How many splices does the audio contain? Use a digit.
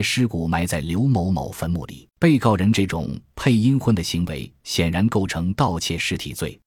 1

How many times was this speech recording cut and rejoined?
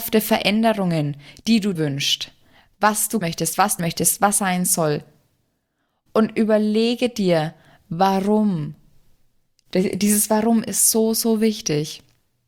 4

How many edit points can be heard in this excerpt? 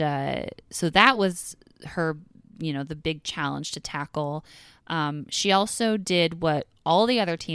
0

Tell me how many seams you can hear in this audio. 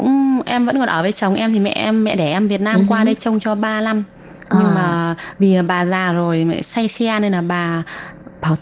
0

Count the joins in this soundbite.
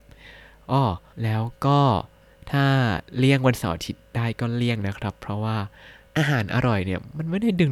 1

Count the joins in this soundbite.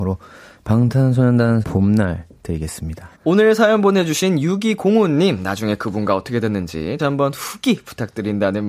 3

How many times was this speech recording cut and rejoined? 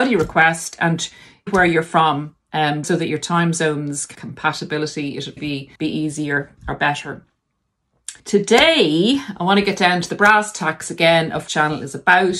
7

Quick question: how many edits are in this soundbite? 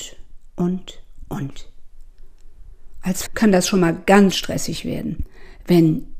2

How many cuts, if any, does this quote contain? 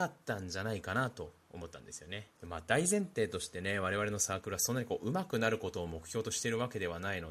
1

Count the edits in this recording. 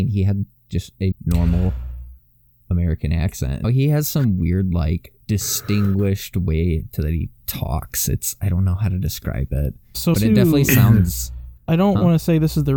5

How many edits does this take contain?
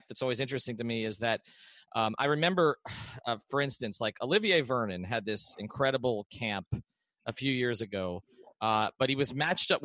0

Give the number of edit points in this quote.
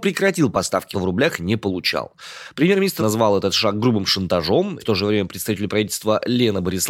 3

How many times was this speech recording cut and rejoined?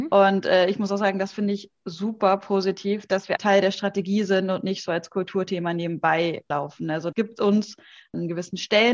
2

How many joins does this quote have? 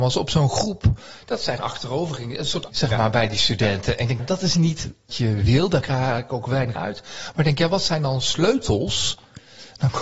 5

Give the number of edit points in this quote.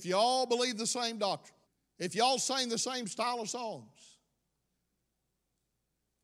1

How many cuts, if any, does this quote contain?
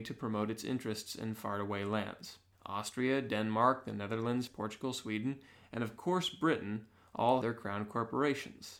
3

